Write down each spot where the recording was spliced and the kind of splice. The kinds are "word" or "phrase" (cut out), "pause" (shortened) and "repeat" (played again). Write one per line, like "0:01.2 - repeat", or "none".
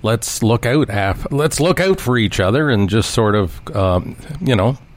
none